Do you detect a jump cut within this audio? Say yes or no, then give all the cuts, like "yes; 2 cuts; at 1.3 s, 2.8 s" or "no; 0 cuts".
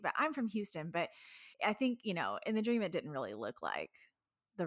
yes; 1 cut; at 1.5 s